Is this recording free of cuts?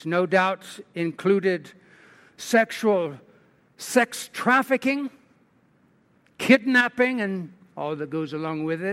yes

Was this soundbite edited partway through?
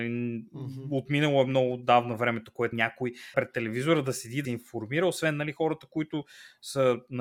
yes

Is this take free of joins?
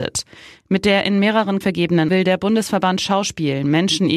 no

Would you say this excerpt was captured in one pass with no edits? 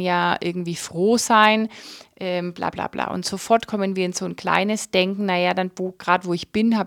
no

